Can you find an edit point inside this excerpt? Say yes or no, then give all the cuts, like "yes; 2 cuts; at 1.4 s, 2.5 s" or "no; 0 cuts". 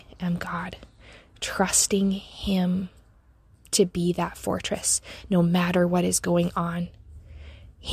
no; 0 cuts